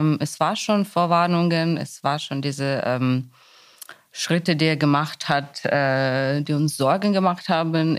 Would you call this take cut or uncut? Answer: uncut